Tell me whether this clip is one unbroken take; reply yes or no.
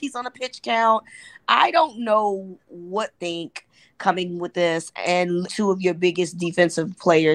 no